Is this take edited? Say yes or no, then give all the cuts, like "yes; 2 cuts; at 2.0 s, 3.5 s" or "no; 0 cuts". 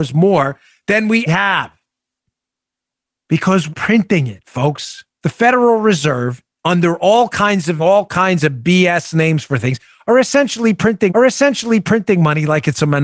yes; 6 cuts; at 1.3 s, 3.7 s, 5.1 s, 6.5 s, 7.8 s, 11.1 s